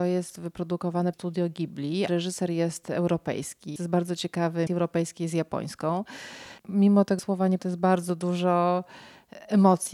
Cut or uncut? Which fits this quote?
cut